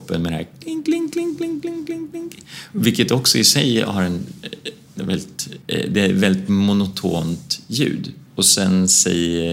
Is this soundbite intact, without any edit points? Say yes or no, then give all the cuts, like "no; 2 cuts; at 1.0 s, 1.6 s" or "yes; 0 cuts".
no; 2 cuts; at 5.6 s, 8.3 s